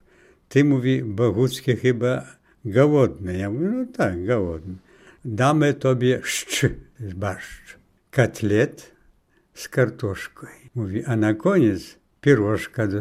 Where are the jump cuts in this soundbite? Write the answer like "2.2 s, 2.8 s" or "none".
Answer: none